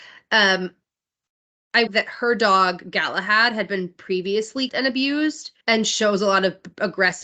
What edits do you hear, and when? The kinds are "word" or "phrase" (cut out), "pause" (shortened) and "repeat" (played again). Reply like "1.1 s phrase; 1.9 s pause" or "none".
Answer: 1.9 s phrase; 4.7 s word; 5.6 s pause